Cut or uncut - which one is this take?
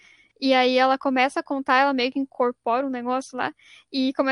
uncut